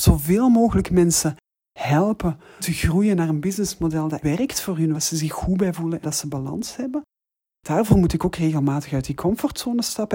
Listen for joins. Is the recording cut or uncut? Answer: cut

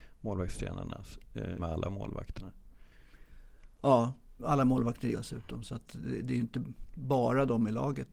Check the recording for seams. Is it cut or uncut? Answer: cut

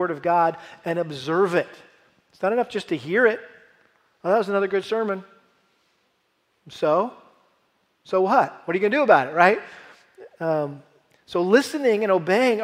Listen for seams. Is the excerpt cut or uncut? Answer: uncut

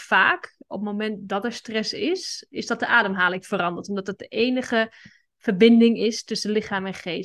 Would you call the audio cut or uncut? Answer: uncut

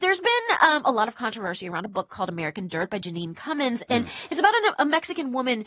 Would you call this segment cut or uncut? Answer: uncut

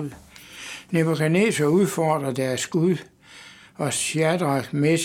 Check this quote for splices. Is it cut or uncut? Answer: uncut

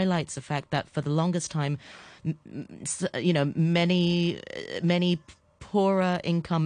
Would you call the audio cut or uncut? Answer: uncut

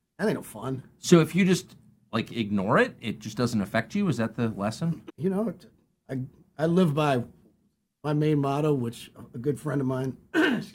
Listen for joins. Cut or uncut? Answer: uncut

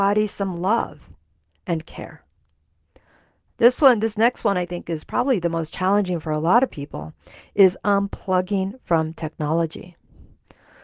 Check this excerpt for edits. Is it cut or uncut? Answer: uncut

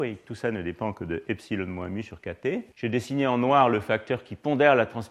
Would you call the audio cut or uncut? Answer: cut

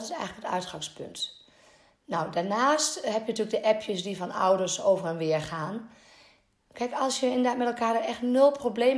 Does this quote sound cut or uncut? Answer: uncut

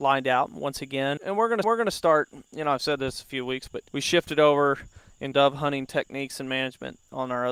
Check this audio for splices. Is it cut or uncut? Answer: cut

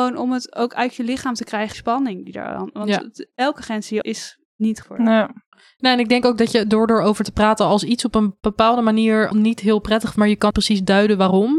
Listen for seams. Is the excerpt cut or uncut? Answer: cut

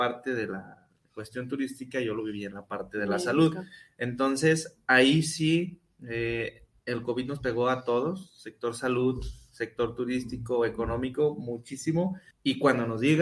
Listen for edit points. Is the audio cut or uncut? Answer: cut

